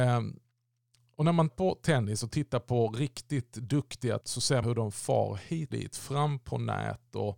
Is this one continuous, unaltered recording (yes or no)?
no